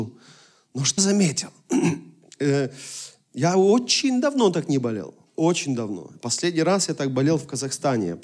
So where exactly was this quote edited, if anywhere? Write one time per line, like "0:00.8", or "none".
0:01.0